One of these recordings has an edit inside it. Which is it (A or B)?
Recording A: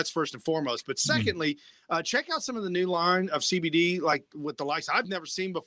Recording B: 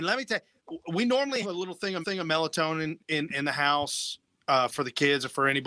B